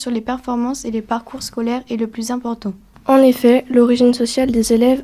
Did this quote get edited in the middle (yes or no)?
no